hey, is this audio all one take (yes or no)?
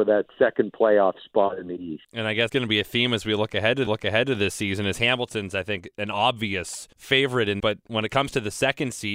no